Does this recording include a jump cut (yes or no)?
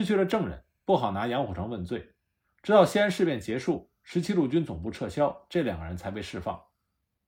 no